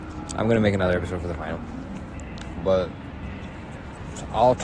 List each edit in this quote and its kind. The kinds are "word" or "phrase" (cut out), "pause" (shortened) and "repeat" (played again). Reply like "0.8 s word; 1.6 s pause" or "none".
none